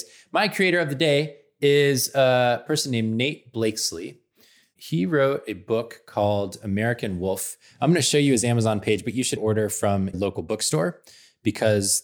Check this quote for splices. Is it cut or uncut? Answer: cut